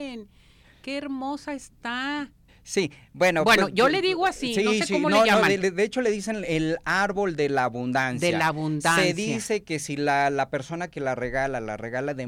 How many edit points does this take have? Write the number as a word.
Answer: one